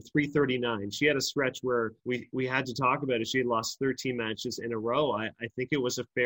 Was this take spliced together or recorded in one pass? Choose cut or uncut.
cut